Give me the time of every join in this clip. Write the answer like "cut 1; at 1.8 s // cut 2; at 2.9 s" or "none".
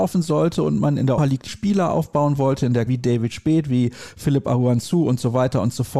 cut 1; at 1.2 s // cut 2; at 1.5 s // cut 3; at 2.9 s